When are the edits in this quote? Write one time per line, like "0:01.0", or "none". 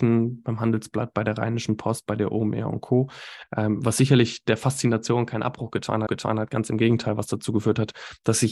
0:06.1